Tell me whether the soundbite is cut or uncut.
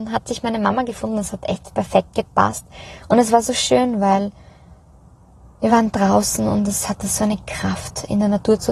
uncut